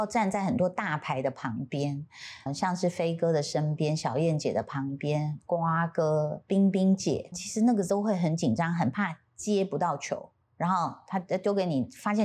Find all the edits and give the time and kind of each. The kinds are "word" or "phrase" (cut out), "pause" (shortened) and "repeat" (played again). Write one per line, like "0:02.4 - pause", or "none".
0:02.5 - word
0:07.3 - word
0:10.4 - pause